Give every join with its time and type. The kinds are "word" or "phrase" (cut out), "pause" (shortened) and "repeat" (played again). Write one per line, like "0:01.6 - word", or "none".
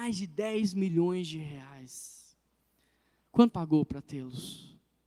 0:03.5 - word